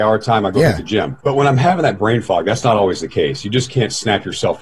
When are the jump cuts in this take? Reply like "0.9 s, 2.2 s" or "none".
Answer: 1.2 s